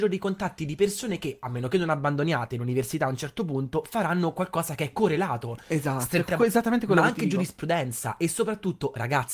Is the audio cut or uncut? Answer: cut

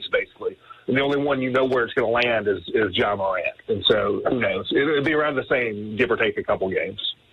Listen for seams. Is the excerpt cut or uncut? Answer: uncut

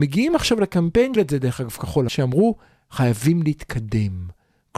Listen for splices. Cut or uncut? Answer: cut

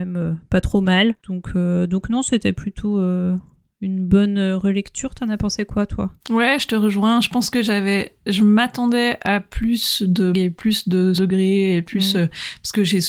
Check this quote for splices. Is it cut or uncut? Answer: cut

